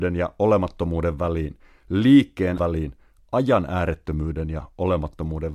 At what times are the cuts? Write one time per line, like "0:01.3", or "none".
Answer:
0:02.6